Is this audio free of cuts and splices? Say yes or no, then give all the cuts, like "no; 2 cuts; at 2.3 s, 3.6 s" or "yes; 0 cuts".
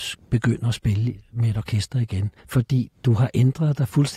no; 1 cut; at 2.4 s